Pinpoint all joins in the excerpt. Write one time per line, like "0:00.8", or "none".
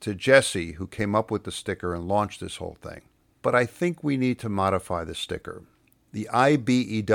0:03.2